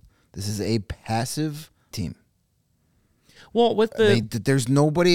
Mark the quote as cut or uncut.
cut